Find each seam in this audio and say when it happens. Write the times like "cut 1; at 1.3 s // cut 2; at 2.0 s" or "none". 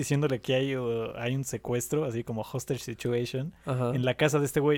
none